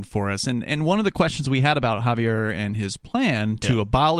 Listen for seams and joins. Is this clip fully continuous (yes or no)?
yes